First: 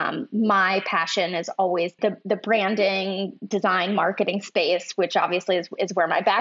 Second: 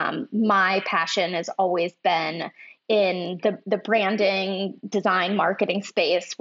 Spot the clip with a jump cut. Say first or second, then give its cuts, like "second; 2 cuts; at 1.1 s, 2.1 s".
first; 1 cut; at 2.0 s